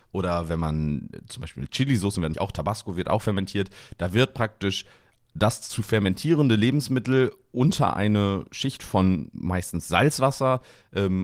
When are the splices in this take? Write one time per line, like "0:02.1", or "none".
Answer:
0:02.3